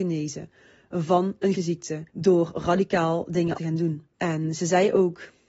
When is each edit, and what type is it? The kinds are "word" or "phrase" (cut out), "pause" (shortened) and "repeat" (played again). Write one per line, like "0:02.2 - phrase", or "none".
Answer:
0:01.5 - word
0:02.1 - pause
0:03.6 - word
0:04.1 - pause